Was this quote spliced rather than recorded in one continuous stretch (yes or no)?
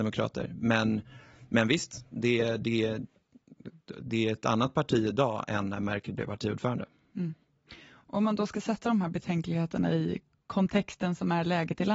no